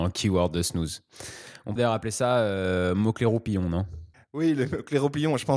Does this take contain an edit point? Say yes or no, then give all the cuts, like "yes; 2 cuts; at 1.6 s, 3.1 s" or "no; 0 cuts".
yes; 2 cuts; at 1.8 s, 4.1 s